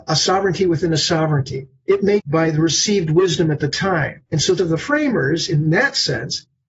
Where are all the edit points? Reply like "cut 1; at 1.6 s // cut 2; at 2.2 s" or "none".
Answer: cut 1; at 2.2 s // cut 2; at 4.2 s // cut 3; at 4.6 s